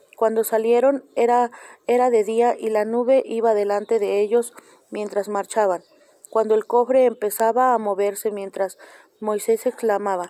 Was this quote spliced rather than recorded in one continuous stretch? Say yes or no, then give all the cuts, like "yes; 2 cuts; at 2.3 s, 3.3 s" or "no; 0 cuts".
no; 0 cuts